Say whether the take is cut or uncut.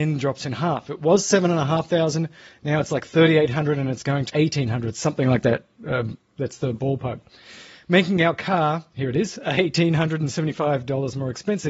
cut